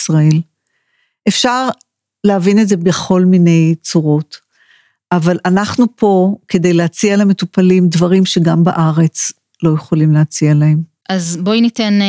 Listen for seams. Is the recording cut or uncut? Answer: uncut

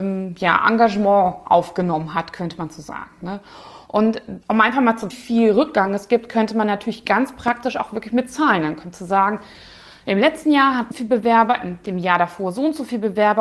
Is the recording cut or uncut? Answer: cut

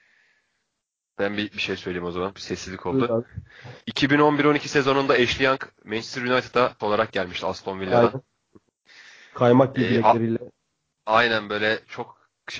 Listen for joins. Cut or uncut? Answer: cut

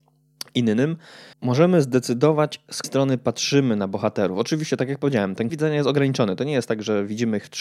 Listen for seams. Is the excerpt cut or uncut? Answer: cut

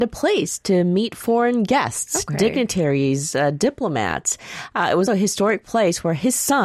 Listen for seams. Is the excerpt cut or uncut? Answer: cut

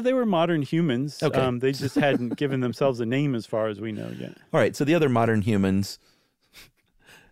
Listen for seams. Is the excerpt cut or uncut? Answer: uncut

